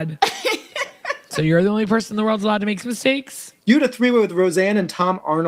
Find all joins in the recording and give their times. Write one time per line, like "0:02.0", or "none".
0:02.8
0:03.6